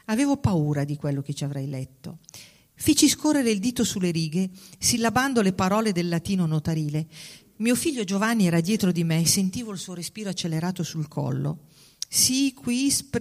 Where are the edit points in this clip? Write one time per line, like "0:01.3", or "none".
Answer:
none